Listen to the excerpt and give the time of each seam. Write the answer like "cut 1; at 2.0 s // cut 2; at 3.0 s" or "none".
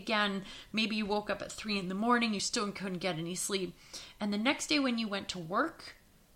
none